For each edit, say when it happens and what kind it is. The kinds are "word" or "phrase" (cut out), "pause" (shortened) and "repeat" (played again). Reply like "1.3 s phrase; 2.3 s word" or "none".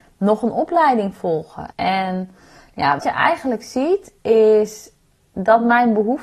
1.7 s pause; 3.0 s word; 4.2 s pause